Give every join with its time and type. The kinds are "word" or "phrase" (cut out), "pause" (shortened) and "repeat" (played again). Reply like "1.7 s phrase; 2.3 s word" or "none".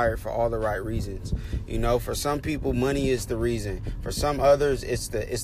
none